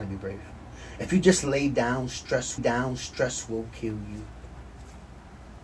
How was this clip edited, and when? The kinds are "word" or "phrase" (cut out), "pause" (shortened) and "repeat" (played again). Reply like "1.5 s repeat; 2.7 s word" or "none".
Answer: 2.6 s repeat